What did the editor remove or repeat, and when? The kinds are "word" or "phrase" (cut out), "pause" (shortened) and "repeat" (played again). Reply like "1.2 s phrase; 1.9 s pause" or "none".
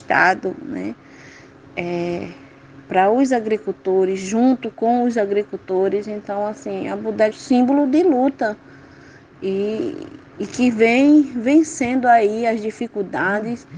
7.3 s phrase; 10.3 s pause